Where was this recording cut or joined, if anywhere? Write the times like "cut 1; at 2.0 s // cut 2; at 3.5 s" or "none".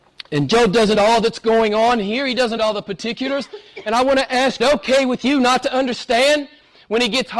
cut 1; at 0.9 s // cut 2; at 2.6 s // cut 3; at 4.6 s

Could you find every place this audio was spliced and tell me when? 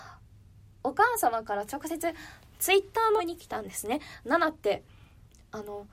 cut 1; at 3.2 s

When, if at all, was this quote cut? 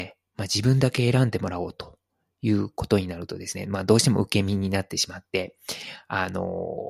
none

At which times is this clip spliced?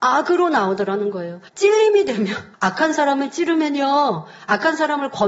cut 1; at 1.5 s // cut 2; at 2.5 s

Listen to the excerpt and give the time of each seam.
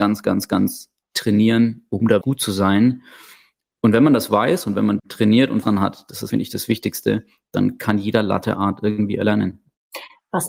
cut 1; at 1.0 s // cut 2; at 2.2 s // cut 3; at 5.0 s // cut 4; at 5.6 s // cut 5; at 6.3 s

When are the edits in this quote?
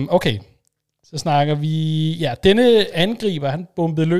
none

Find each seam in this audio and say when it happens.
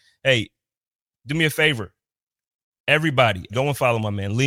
cut 1; at 3.5 s

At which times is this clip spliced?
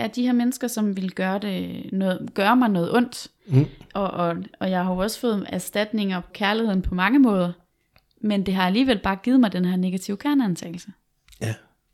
cut 1; at 6.3 s

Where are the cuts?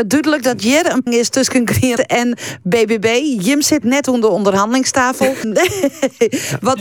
cut 1; at 1.1 s // cut 2; at 2.0 s // cut 3; at 3.8 s // cut 4; at 5.4 s

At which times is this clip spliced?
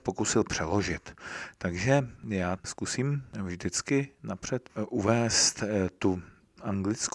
cut 1; at 2.6 s

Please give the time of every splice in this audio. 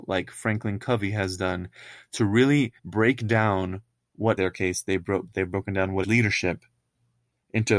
cut 1; at 2.8 s // cut 2; at 4.4 s // cut 3; at 6.0 s

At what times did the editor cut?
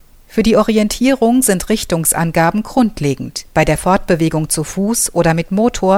cut 1; at 3.5 s

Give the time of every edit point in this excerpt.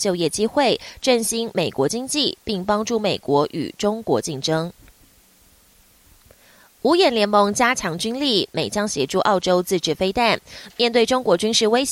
none

